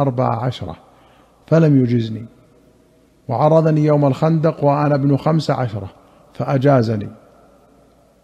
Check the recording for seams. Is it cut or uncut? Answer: uncut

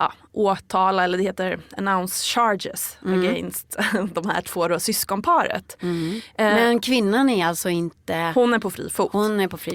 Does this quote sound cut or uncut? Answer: uncut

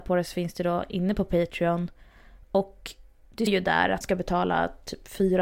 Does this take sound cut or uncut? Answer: cut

